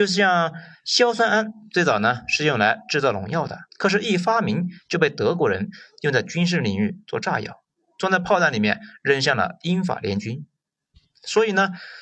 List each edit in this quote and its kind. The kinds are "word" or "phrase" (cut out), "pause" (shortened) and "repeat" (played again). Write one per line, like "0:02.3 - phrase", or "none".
0:03.7 - pause